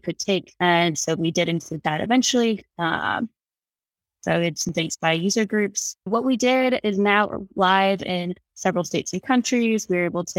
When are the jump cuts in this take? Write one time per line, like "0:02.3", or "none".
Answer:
0:02.7
0:06.1